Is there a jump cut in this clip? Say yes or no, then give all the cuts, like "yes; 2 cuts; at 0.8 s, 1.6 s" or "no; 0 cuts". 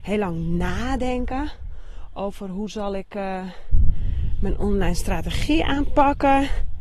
no; 0 cuts